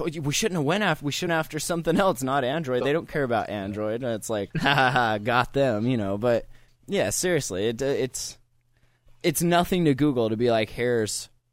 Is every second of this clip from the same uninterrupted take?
no; 3 cuts; at 1.3 s, 4.5 s, 6.7 s

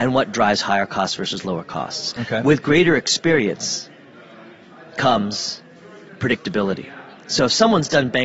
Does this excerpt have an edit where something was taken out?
no; 0 cuts

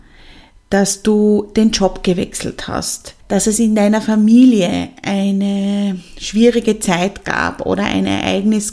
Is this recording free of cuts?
no; 1 cut; at 3.2 s

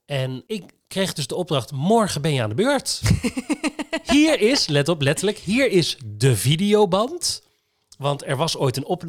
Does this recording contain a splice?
no; 0 cuts

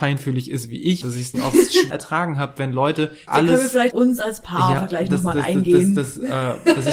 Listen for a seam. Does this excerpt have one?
yes; 6 cuts; at 1.0 s, 1.3 s, 1.9 s, 3.3 s, 3.9 s, 4.8 s

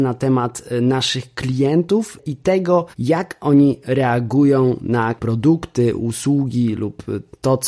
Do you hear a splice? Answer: yes; 2 cuts; at 2.9 s, 5.2 s

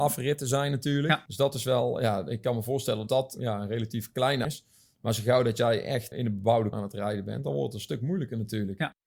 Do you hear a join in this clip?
yes; 4 cuts; at 3.1 s, 4.4 s, 6.1 s, 6.7 s

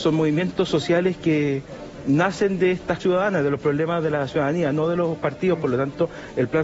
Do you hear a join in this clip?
yes; 1 cut; at 3.0 s

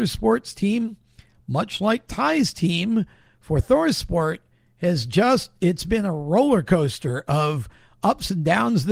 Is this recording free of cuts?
yes; 0 cuts

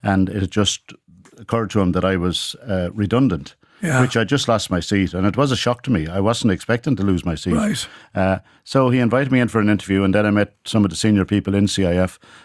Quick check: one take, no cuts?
yes; 0 cuts

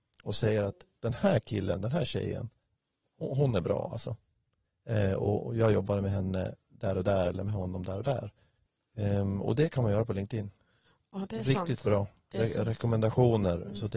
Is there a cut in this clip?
no; 0 cuts

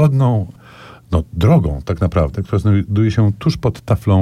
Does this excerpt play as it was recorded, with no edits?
yes; 0 cuts

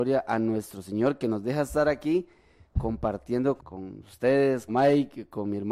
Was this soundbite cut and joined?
yes; 2 cuts; at 3.6 s, 4.7 s

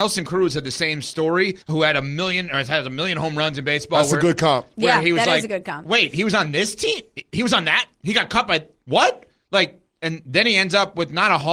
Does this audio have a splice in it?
yes; 1 cut; at 1.6 s

